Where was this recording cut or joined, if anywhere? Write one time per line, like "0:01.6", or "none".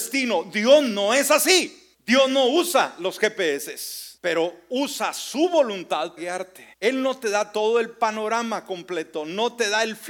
0:01.9
0:04.2
0:06.2
0:06.7